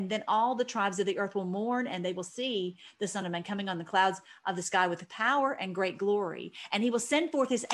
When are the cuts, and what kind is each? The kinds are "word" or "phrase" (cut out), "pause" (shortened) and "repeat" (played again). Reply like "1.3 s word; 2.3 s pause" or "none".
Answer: none